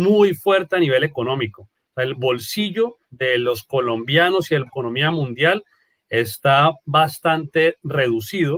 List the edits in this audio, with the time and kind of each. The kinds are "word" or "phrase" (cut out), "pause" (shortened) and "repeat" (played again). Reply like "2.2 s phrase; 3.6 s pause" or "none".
3.0 s pause; 4.7 s phrase